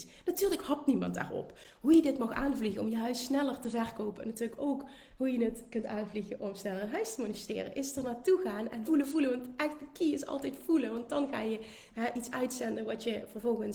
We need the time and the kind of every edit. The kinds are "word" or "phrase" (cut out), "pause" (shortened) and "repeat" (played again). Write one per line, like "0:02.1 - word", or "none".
0:08.9 - word